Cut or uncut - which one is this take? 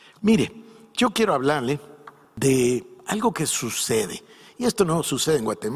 uncut